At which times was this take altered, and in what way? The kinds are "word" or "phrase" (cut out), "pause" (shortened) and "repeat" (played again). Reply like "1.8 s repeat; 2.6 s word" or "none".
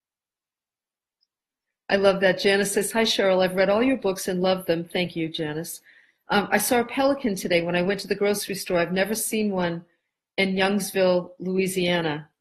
none